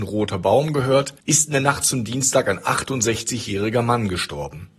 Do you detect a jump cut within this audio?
yes; 1 cut; at 1.2 s

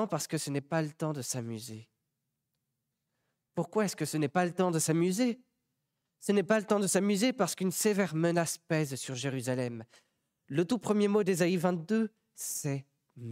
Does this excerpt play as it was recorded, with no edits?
yes; 0 cuts

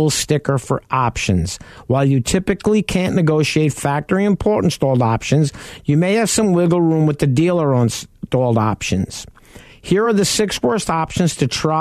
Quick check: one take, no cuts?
yes; 0 cuts

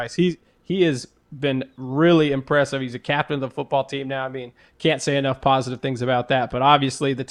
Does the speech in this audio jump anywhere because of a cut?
no; 0 cuts

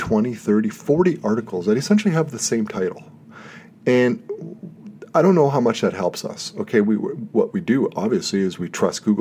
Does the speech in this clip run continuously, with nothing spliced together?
yes; 0 cuts

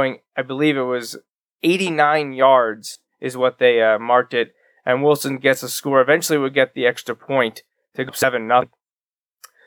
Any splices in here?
no; 0 cuts

